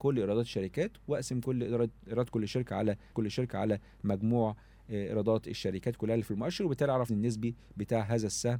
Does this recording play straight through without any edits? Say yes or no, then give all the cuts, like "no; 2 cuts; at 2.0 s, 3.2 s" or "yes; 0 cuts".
no; 2 cuts; at 3.1 s, 7.1 s